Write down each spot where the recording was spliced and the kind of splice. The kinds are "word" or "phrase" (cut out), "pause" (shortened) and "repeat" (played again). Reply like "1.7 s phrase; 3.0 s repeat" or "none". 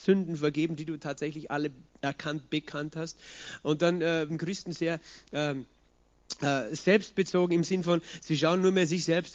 4.3 s word

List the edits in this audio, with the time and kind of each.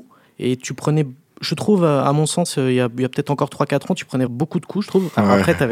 4.3 s word

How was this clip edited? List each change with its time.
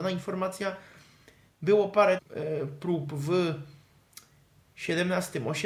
2.2 s phrase

